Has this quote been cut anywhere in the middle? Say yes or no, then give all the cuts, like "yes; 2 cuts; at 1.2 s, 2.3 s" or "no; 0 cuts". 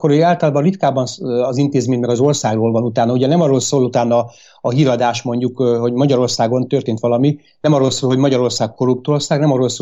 no; 0 cuts